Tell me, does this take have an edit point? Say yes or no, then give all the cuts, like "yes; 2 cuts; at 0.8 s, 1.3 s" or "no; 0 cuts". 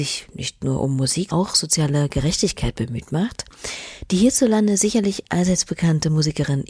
yes; 1 cut; at 1.3 s